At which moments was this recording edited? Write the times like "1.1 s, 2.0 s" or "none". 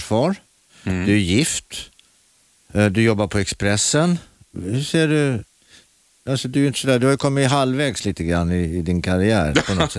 none